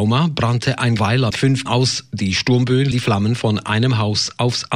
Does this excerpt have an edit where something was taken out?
yes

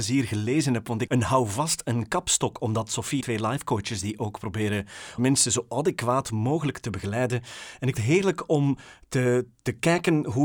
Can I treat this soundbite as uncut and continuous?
no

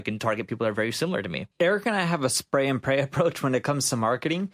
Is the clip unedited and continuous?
no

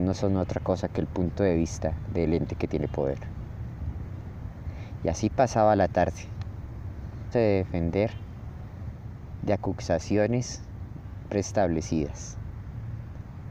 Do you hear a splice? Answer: yes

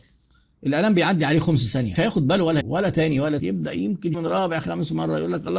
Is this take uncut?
no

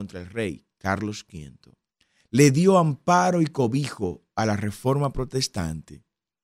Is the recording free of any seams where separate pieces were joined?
no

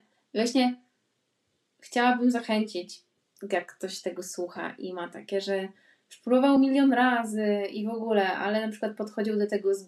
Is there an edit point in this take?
no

